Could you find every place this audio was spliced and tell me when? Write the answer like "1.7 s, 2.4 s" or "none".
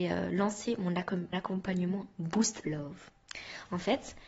1.3 s, 2.6 s